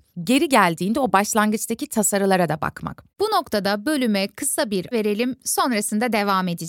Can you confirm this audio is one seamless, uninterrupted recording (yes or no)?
no